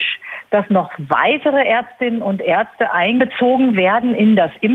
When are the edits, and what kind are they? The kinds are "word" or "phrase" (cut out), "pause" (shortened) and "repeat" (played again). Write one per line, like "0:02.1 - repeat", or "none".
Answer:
none